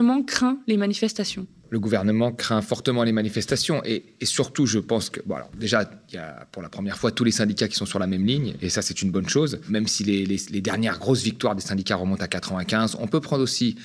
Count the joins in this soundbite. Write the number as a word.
zero